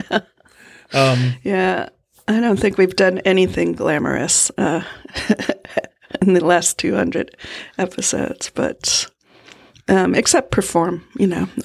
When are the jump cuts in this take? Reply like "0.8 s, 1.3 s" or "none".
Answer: none